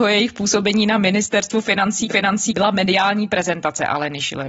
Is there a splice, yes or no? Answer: yes